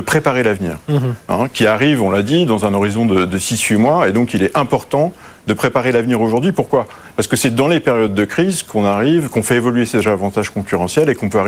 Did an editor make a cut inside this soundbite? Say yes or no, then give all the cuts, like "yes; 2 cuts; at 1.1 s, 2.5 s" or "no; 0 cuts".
no; 0 cuts